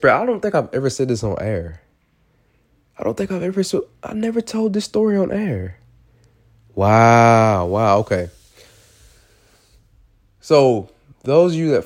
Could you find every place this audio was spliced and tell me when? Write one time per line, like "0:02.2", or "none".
none